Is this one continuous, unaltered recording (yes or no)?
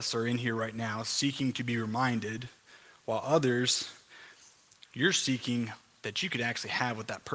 yes